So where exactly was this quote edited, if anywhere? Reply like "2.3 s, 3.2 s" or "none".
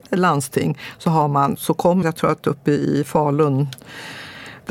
1.6 s, 2.0 s